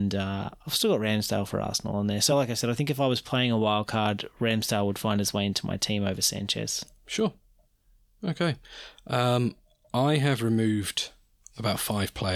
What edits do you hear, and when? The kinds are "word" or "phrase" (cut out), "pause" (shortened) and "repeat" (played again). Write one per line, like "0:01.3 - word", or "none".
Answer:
none